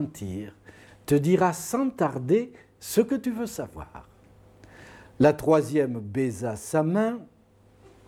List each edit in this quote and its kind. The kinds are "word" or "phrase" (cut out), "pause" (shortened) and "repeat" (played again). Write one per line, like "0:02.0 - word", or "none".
none